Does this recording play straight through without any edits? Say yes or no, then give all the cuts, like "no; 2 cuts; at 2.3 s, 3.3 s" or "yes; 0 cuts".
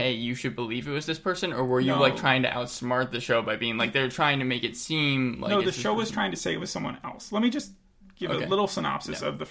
yes; 0 cuts